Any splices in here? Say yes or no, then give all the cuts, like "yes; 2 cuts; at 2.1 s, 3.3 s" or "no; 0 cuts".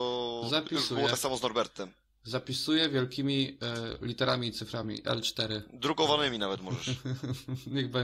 no; 0 cuts